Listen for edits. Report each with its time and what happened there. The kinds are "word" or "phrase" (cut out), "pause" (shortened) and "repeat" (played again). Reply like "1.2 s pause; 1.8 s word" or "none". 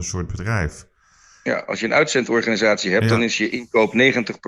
none